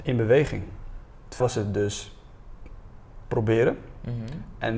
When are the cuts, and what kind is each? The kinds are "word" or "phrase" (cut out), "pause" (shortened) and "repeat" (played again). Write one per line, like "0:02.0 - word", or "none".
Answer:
0:01.4 - word